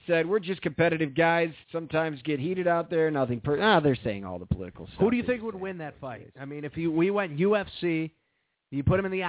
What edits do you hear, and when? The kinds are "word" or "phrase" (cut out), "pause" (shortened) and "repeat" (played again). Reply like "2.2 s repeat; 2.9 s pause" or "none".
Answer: 1.6 s pause